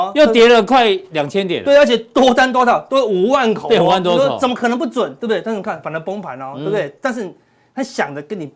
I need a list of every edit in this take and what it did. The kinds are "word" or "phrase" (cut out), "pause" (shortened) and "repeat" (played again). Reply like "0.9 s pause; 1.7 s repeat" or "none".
none